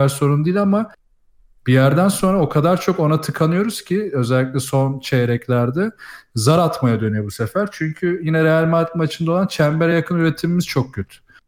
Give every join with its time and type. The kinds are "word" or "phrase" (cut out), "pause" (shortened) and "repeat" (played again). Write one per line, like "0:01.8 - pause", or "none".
none